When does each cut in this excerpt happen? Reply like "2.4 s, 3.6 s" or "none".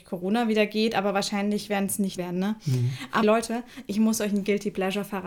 2.2 s, 3.2 s